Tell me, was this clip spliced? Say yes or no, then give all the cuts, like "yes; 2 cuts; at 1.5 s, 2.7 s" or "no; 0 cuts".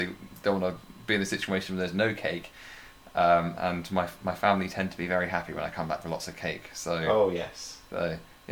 no; 0 cuts